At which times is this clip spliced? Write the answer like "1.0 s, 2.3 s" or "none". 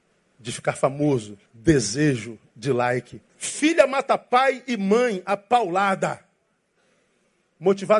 1.5 s, 3.3 s